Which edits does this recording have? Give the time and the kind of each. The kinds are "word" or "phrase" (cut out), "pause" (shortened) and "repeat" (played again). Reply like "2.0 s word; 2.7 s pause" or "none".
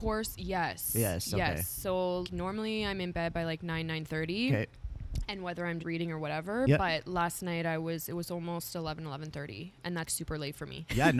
2.2 s word; 5.8 s word; 10.1 s word